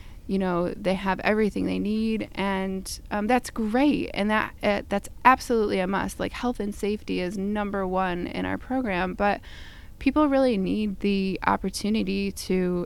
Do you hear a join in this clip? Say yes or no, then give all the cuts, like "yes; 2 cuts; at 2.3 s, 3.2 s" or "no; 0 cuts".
no; 0 cuts